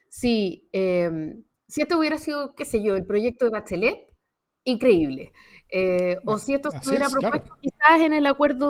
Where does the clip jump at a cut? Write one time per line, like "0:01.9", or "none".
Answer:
none